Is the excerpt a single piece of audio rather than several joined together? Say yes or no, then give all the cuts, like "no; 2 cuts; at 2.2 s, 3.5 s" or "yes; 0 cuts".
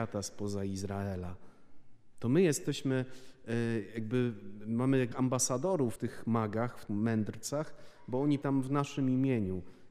no; 4 cuts; at 5.1 s, 6.0 s, 6.9 s, 8.4 s